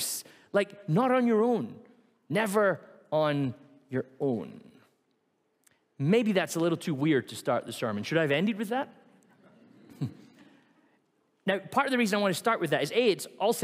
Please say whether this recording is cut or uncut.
uncut